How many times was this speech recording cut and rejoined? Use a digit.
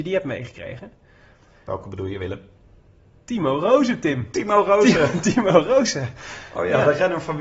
0